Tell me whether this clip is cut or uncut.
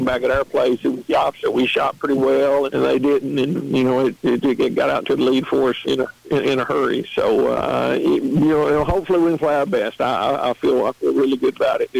cut